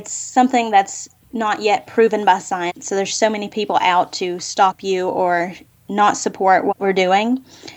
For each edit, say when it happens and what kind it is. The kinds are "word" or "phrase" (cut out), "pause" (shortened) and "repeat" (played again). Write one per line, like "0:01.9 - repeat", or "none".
none